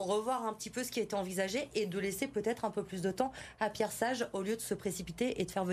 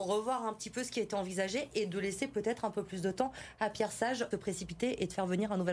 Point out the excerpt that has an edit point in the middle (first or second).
second